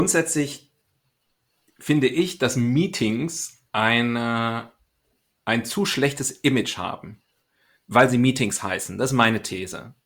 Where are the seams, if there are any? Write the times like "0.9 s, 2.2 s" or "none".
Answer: none